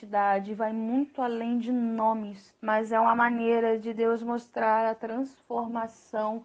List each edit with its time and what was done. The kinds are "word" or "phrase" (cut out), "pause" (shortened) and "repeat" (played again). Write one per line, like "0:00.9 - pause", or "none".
0:02.6 - pause

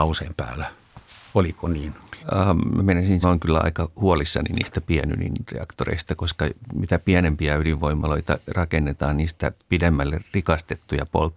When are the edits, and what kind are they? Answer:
0:01.1 - pause
0:02.2 - pause
0:03.2 - phrase

